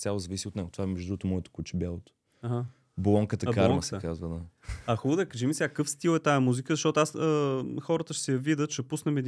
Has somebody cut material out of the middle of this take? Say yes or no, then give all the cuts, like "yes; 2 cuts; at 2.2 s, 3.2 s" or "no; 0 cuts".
no; 0 cuts